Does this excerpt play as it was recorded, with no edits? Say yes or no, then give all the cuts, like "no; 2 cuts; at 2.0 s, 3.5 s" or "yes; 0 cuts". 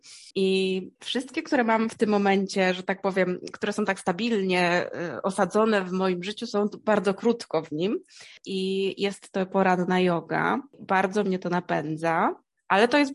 no; 1 cut; at 0.9 s